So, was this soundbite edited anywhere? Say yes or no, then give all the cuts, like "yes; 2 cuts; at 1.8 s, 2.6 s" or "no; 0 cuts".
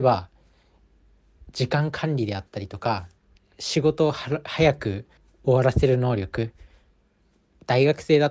yes; 2 cuts; at 3.2 s, 5.2 s